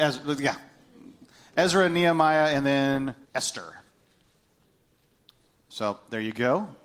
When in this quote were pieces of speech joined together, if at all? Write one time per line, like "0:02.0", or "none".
0:03.2